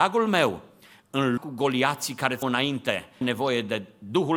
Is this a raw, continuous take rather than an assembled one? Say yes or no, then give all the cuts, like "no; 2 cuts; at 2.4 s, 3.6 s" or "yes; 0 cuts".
no; 3 cuts; at 1.4 s, 2.4 s, 3.2 s